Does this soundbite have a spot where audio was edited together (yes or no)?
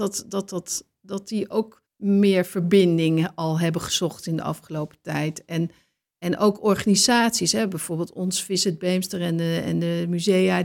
yes